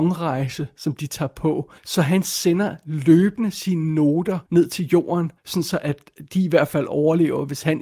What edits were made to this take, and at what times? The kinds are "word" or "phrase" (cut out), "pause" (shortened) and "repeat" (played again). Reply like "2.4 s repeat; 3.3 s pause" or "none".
1.8 s pause; 4.5 s pause; 5.4 s pause